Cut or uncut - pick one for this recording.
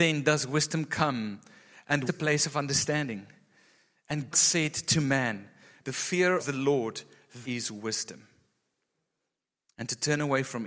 cut